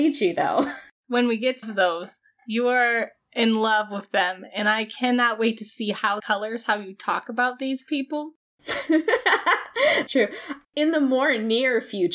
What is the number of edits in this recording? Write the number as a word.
four